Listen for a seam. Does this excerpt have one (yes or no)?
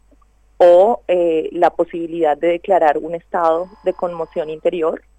no